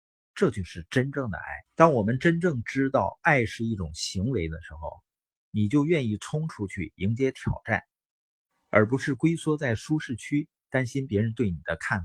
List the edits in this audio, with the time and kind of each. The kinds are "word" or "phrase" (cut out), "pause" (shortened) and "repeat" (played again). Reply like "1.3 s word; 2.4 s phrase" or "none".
1.7 s pause